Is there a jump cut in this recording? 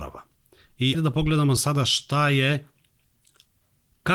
yes; 2 cuts; at 0.9 s, 1.6 s

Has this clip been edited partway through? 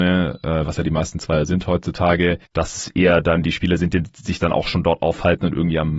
no; 0 cuts

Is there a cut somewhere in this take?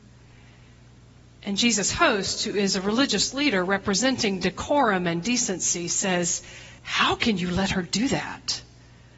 yes; 1 cut; at 6.8 s

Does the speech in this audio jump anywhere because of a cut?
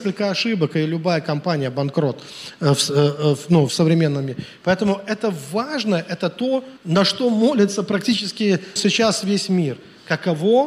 yes; 3 cuts; at 3.7 s, 6.8 s, 8.8 s

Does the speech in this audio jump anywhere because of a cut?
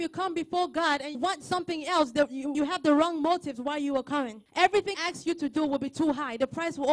yes; 3 cuts; at 1.1 s, 2.5 s, 4.9 s

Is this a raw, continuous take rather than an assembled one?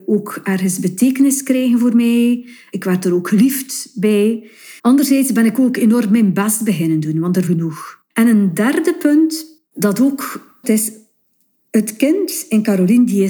no; 5 cuts; at 4.8 s, 7.5 s, 8.1 s, 9.7 s, 10.6 s

